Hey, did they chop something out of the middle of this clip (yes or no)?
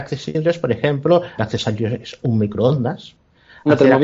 yes